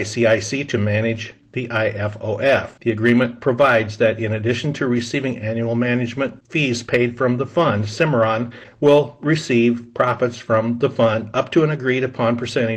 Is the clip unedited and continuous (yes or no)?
no